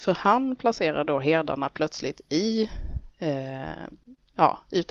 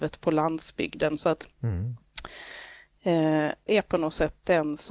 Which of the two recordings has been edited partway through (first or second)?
second